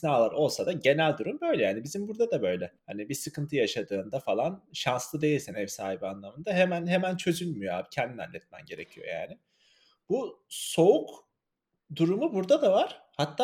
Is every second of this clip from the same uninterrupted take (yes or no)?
no